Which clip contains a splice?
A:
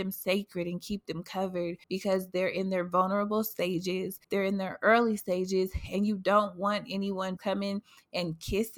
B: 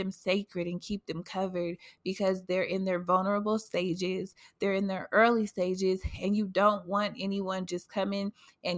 A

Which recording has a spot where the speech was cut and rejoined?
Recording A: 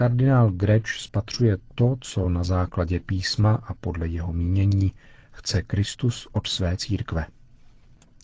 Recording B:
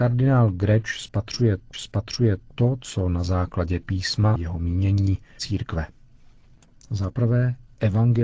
B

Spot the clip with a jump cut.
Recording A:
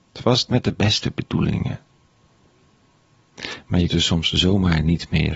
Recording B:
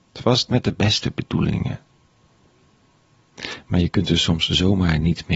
A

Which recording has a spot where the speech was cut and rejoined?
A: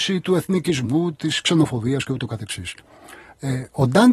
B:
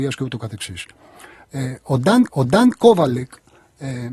B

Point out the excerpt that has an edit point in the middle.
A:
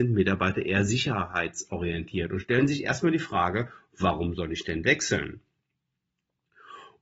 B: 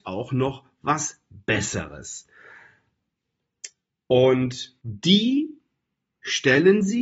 B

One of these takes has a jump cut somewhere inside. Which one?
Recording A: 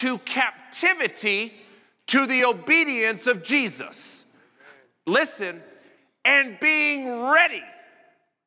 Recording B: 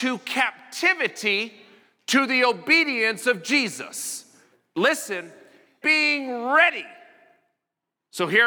B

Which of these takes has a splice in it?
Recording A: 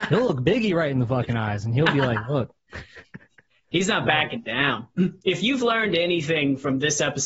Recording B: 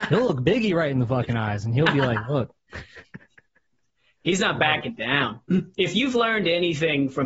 A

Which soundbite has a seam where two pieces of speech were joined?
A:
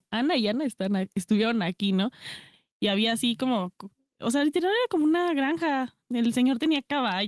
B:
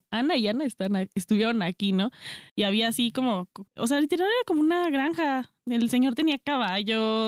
B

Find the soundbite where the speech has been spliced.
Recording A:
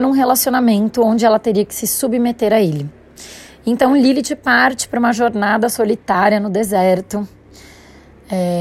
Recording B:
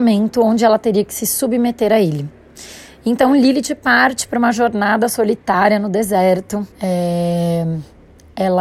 B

